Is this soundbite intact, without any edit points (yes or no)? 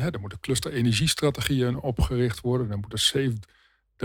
yes